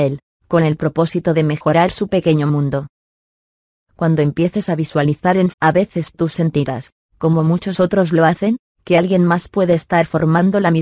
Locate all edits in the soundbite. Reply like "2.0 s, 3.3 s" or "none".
5.5 s